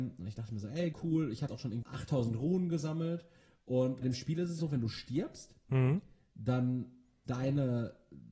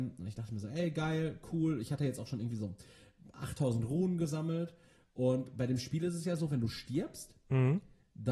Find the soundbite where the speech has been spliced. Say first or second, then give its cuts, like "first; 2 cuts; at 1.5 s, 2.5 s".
first; 6 cuts; at 0.9 s, 1.5 s, 1.8 s, 4.0 s, 4.6 s, 7.3 s